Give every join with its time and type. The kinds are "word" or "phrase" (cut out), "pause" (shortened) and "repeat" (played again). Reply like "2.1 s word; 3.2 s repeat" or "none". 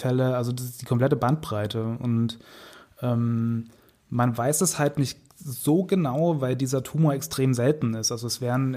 none